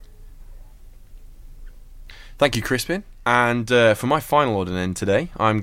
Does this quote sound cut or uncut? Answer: uncut